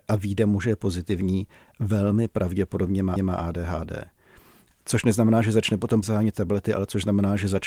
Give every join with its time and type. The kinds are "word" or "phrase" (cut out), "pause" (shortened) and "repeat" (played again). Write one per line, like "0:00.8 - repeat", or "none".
0:03.2 - repeat
0:06.0 - word